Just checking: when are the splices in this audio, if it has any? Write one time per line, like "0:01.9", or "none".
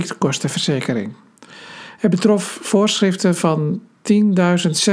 none